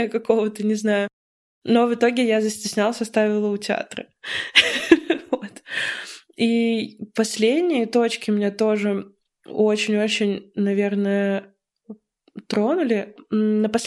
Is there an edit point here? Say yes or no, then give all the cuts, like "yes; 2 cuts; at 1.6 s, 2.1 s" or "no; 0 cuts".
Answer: no; 0 cuts